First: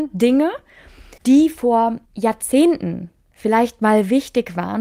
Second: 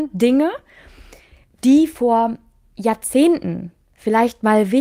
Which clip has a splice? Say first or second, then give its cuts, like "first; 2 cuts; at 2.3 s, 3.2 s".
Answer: first; 2 cuts; at 1.2 s, 2.0 s